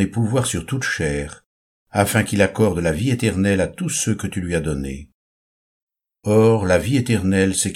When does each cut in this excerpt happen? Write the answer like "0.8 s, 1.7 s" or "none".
none